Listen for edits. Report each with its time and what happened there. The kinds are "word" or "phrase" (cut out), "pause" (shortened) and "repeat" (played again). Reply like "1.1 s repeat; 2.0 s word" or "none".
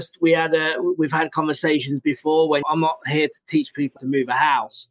2.6 s phrase; 4.0 s word